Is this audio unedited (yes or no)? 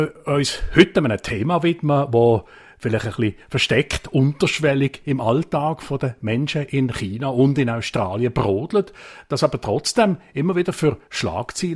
yes